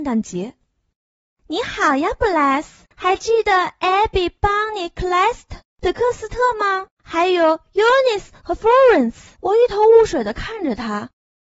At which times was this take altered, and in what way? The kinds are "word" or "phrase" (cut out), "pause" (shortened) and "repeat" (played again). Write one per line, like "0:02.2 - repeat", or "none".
0:02.9 - pause
0:06.9 - pause
0:09.4 - pause